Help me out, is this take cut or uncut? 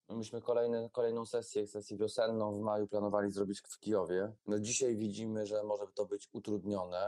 cut